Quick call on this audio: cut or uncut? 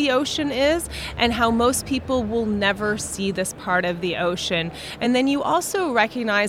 uncut